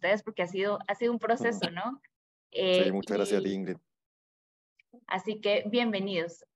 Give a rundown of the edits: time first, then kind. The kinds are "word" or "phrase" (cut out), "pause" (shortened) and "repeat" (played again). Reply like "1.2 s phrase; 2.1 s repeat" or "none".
none